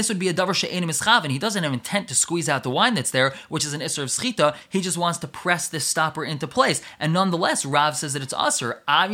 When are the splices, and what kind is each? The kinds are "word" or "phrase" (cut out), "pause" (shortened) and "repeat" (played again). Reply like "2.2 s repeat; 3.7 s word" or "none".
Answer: none